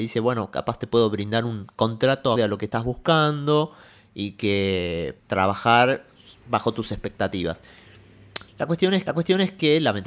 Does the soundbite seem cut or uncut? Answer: cut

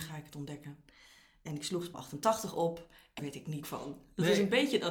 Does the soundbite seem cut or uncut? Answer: cut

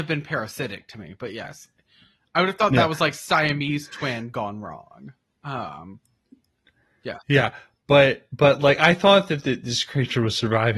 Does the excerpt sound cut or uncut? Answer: uncut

